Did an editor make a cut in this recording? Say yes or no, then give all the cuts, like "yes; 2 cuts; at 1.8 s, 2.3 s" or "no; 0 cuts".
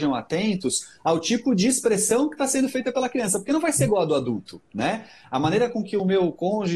no; 0 cuts